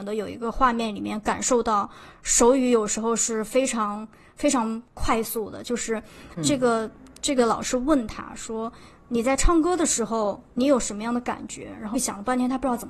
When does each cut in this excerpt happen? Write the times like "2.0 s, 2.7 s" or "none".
6.4 s, 7.4 s, 11.9 s